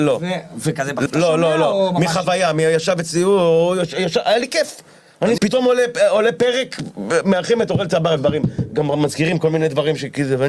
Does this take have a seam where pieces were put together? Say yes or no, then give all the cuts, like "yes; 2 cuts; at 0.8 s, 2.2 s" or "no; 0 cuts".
yes; 3 cuts; at 1.1 s, 5.4 s, 8.2 s